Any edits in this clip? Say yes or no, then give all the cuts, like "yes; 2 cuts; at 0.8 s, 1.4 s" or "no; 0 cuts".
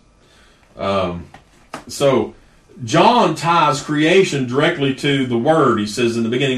no; 0 cuts